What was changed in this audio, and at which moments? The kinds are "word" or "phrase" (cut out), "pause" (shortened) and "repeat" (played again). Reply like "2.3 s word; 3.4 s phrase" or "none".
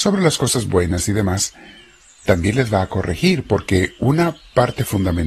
none

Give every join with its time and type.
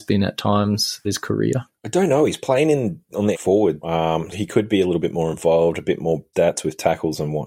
1.0 s word; 3.3 s word; 3.8 s word; 4.3 s word; 6.3 s word

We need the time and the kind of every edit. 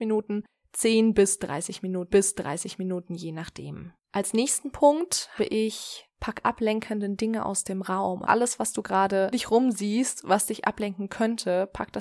2.1 s repeat; 4.0 s pause; 5.4 s word; 6.4 s word; 8.2 s word; 9.3 s word

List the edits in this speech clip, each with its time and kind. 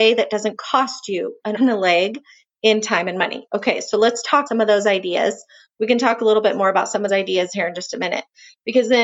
1.6 s word; 4.5 s word; 7.1 s word

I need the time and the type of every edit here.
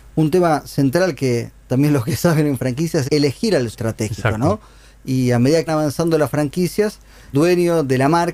1.7 s word; 3.0 s word; 3.7 s word; 5.7 s word; 7.3 s word

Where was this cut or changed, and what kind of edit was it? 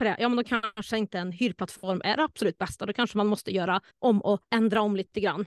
3.9 s pause; 4.5 s pause

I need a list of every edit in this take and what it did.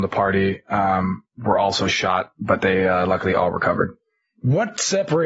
none

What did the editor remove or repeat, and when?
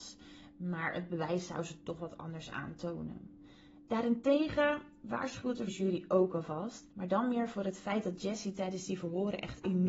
5.7 s word; 6.9 s pause

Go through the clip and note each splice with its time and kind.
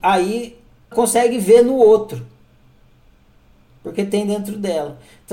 0.9 s word

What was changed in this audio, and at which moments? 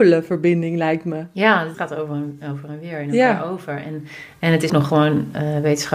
1.7 s word; 4.7 s word

